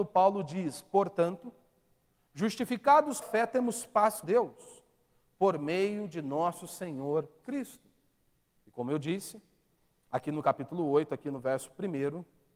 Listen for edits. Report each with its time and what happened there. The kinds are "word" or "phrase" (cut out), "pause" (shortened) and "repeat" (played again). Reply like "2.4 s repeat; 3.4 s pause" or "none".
3.2 s word; 4.2 s word; 7.4 s word

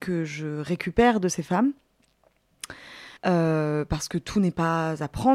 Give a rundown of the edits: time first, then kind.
3.2 s pause

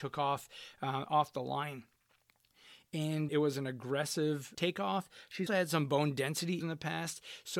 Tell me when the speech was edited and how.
3.3 s word; 4.5 s word; 5.5 s word; 6.6 s word

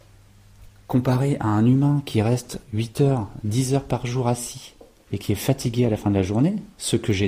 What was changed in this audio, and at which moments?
none

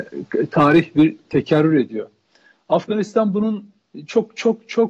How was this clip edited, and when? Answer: none

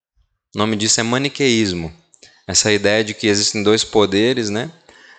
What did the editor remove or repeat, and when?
none

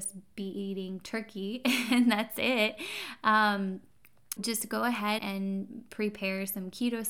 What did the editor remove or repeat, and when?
4.4 s word; 5.2 s word

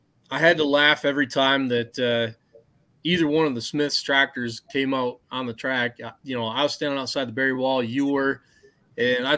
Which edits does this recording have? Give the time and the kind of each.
none

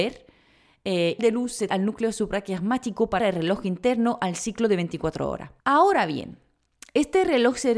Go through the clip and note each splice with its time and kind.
1.2 s phrase; 1.7 s word; 3.2 s word; 5.6 s pause

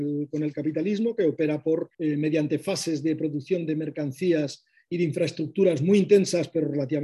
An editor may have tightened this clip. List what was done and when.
1.9 s pause

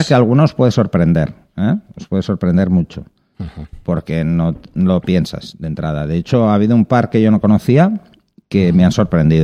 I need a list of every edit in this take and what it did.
none

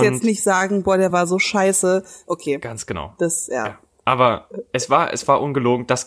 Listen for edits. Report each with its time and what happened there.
none

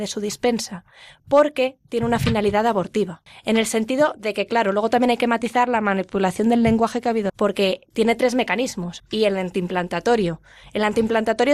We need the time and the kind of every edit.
3.3 s pause; 7.3 s word; 9.0 s phrase

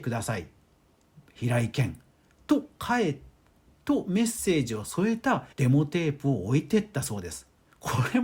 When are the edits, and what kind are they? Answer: 5.5 s pause

